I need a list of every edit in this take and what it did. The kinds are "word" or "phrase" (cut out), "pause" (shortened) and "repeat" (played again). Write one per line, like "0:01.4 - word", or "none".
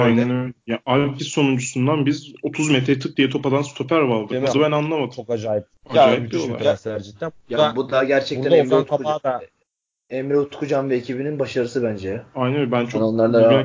0:01.2 - word
0:04.5 - phrase
0:05.7 - pause
0:09.6 - pause